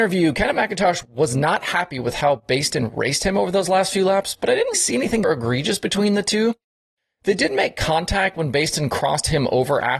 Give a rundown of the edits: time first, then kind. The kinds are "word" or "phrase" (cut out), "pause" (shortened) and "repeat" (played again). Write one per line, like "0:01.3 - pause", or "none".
0:04.7 - word
0:05.2 - word